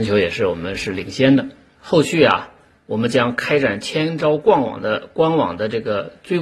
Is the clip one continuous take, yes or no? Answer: yes